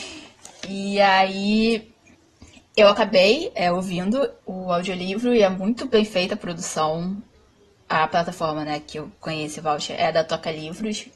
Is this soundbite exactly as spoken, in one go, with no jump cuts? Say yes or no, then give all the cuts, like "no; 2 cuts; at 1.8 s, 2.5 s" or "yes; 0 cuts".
yes; 0 cuts